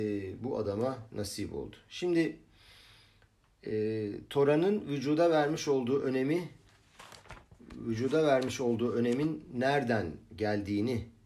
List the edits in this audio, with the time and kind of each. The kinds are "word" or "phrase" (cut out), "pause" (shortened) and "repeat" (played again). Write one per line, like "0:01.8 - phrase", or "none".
none